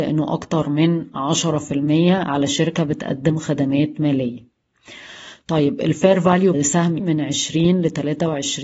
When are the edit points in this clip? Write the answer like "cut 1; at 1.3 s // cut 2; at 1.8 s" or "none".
cut 1; at 6.5 s // cut 2; at 7.0 s